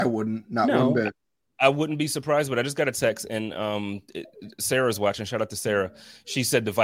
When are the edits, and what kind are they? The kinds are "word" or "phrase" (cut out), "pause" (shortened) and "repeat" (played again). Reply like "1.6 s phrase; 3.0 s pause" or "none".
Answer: none